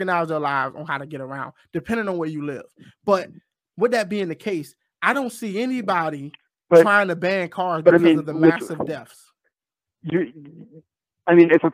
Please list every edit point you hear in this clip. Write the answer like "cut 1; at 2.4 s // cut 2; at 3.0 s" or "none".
none